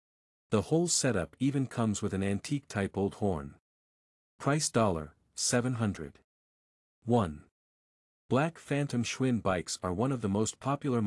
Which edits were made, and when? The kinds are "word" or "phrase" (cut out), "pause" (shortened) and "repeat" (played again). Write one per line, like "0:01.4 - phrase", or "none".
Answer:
none